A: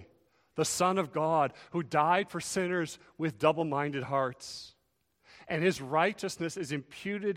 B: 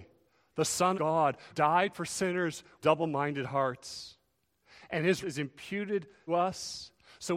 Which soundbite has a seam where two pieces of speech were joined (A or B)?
B